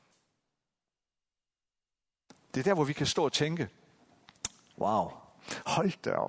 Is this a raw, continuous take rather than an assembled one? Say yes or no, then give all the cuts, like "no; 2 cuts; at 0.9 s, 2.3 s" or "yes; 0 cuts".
yes; 0 cuts